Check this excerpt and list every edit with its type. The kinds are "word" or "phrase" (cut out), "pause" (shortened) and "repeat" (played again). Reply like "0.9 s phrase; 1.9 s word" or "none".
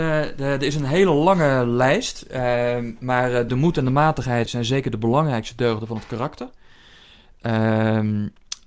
3.5 s word; 4.5 s word